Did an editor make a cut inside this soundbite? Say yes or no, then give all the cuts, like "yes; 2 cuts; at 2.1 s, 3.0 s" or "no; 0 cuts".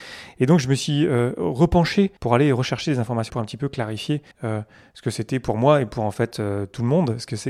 yes; 3 cuts; at 2.2 s, 3.3 s, 4.3 s